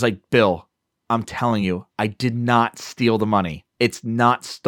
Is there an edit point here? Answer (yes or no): no